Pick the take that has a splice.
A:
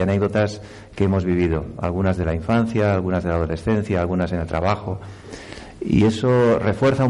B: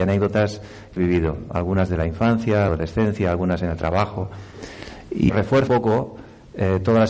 B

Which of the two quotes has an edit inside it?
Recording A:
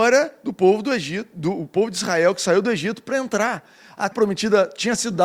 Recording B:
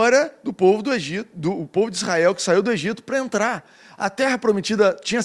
A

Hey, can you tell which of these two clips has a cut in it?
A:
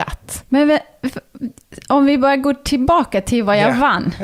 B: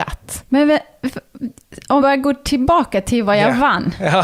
B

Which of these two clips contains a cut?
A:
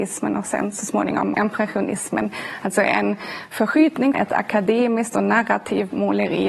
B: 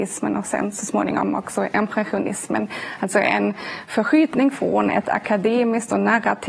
A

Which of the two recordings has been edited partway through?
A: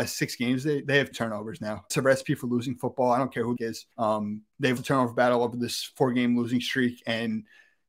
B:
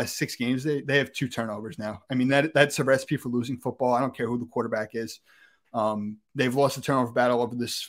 A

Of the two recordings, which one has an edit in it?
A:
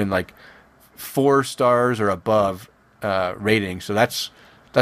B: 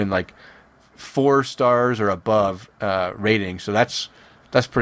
B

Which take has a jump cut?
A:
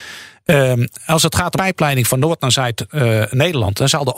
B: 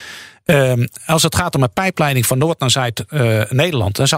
A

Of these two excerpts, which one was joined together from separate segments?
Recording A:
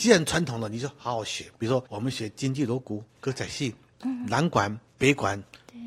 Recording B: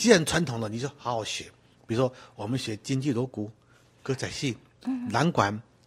A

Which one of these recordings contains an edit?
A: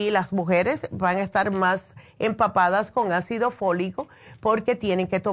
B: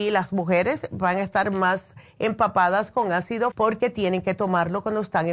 B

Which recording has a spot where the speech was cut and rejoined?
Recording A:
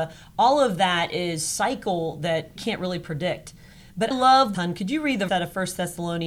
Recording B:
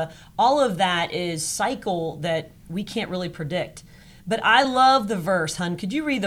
A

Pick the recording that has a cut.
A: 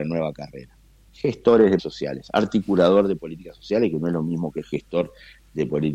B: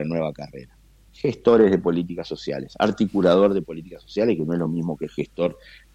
A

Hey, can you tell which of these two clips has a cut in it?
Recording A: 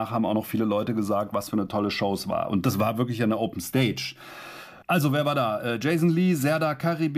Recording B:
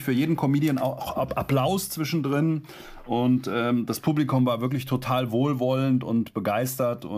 A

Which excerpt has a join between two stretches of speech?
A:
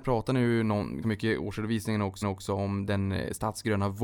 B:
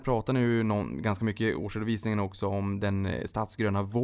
A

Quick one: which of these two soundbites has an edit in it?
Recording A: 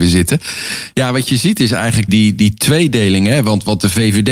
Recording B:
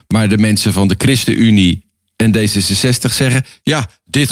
A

